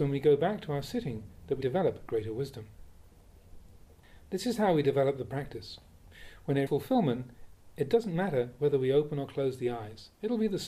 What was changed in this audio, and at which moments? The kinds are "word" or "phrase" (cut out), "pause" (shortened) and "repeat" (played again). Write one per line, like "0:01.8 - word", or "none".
0:01.6 - word
0:06.7 - word